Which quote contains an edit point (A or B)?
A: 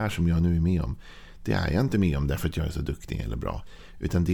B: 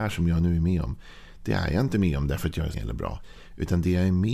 B